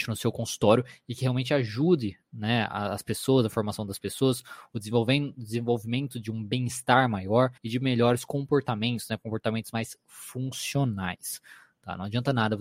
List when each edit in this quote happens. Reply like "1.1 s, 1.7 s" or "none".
7.6 s

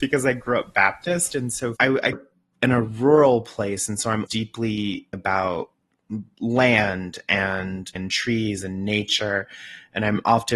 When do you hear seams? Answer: 1.8 s, 2.1 s, 4.3 s, 5.1 s, 7.9 s

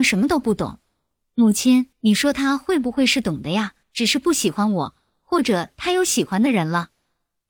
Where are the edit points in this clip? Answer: 1.9 s, 3.8 s

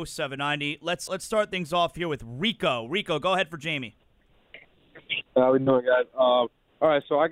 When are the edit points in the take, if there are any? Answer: 1.1 s, 5.3 s

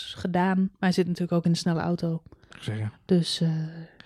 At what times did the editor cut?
none

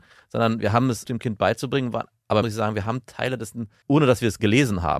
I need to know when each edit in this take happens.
1.1 s, 2.4 s, 3.8 s

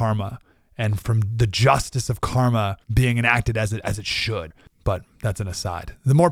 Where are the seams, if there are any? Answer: 1.0 s, 2.8 s, 4.7 s

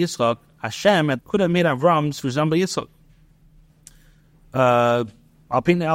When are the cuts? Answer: 1.2 s, 2.2 s

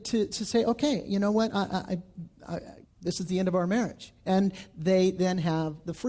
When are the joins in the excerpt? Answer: 2.8 s

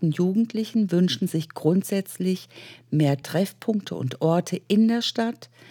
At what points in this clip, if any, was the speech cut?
none

